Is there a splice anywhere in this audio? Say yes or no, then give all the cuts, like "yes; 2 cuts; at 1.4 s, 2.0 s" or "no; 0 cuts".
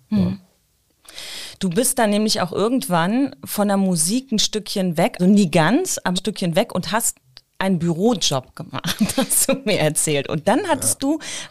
yes; 2 cuts; at 5.2 s, 6.2 s